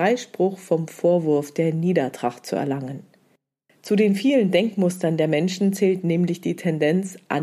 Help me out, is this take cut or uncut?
uncut